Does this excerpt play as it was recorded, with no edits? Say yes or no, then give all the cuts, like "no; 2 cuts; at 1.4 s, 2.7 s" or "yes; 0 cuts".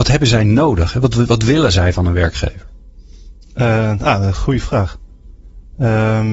yes; 0 cuts